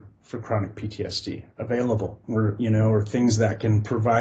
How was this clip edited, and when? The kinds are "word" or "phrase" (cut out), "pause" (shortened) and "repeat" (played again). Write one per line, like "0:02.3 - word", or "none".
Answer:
0:02.2 - pause

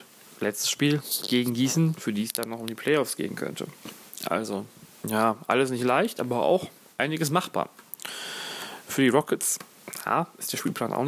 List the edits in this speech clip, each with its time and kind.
none

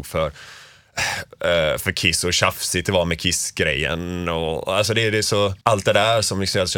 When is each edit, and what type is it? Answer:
0:05.6 - pause

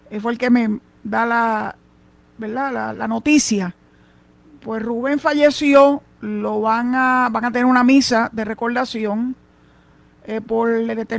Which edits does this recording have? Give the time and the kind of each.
none

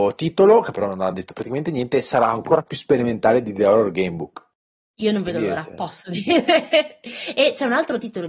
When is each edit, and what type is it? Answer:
none

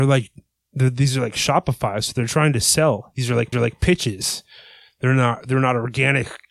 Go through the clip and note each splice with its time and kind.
0:03.5 - repeat

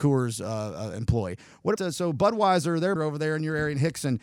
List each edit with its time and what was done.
0:01.8 - word
0:03.0 - word

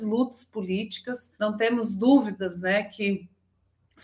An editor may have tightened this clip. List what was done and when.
0:01.3 - pause

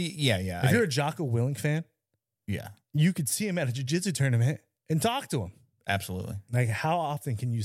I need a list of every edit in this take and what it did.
none

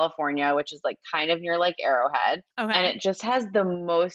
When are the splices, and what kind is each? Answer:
0:02.5 - pause

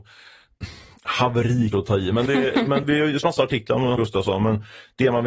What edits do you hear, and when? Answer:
0:01.7 - word
0:02.3 - word
0:02.8 - word
0:03.2 - word
0:04.0 - word

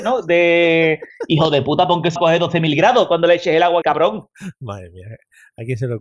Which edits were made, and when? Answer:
0:02.2 - word
0:03.8 - word

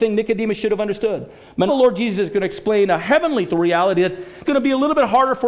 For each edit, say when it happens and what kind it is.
0:01.7 - word
0:03.5 - word
0:04.4 - word

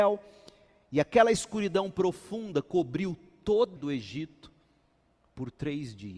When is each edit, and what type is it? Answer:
0:03.8 - phrase

